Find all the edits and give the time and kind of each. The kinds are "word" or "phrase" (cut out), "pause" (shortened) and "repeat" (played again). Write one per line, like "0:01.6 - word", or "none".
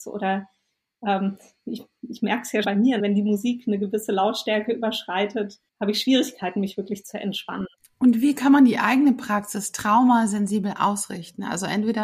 0:02.6 - word
0:03.0 - word
0:05.7 - pause
0:07.8 - pause